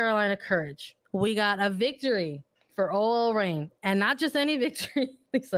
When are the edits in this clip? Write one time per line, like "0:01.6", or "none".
0:01.0
0:02.6